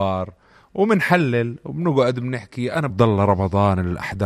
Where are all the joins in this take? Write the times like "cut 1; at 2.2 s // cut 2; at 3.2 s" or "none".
cut 1; at 2.9 s